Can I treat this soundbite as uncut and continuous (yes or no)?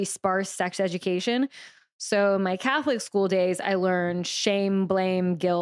yes